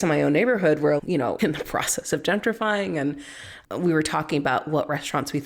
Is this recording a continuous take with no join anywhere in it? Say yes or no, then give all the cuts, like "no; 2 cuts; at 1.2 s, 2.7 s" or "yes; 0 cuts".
no; 2 cuts; at 1.0 s, 1.4 s